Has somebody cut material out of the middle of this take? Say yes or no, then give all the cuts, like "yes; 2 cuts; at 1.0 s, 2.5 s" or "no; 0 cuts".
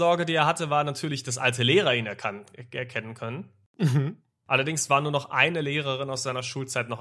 no; 0 cuts